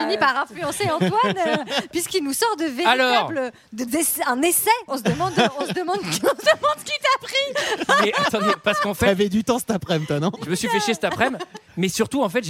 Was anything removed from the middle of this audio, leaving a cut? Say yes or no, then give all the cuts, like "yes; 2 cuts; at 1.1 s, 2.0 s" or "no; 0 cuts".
yes; 1 cut; at 3.9 s